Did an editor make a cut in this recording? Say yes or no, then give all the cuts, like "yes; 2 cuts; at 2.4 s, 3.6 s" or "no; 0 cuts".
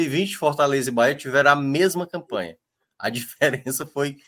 no; 0 cuts